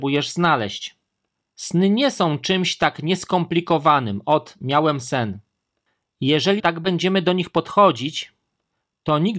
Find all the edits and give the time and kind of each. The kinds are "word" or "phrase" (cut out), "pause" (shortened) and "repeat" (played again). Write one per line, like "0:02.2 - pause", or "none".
0:06.6 - word